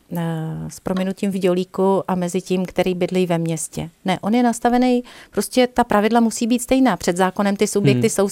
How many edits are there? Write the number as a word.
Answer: zero